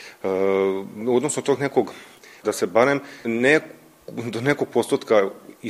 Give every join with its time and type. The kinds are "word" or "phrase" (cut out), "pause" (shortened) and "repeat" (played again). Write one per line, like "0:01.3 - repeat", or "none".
0:02.4 - word
0:03.2 - word